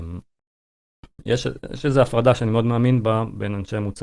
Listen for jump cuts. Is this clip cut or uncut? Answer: uncut